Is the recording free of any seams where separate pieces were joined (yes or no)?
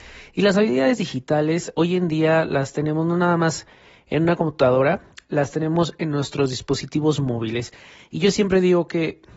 yes